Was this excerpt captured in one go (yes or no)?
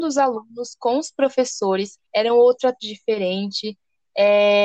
no